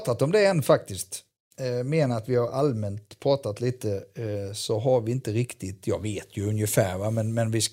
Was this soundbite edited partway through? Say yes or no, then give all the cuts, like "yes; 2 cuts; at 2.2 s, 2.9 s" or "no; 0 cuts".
no; 0 cuts